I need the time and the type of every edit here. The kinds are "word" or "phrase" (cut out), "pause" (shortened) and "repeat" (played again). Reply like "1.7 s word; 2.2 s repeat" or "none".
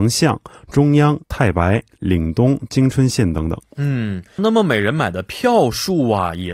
1.2 s pause; 4.4 s word